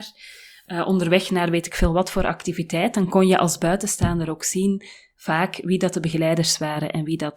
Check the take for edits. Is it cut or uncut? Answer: uncut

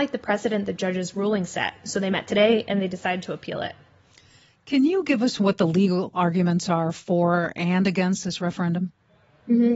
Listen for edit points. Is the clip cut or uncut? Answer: uncut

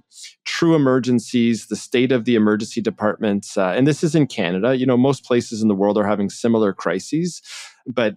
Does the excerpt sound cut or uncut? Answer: uncut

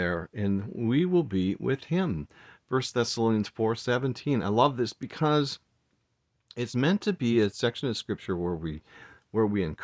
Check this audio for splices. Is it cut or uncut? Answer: uncut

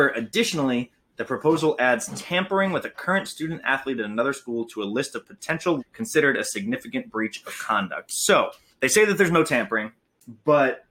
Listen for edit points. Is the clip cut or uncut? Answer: cut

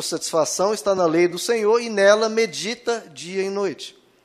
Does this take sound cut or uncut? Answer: uncut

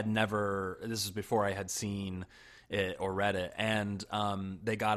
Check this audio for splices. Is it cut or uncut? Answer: uncut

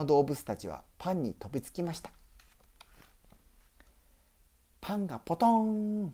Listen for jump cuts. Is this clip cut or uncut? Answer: cut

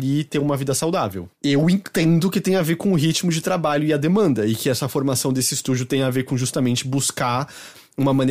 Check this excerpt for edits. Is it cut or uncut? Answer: cut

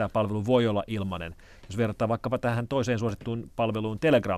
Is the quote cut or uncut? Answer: uncut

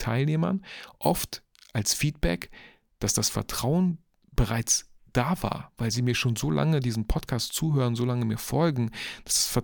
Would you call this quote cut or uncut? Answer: uncut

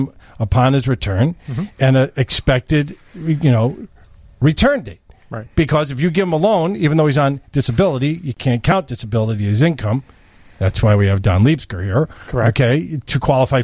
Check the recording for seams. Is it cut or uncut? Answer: uncut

